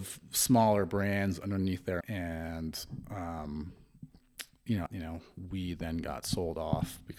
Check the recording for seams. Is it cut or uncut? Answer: cut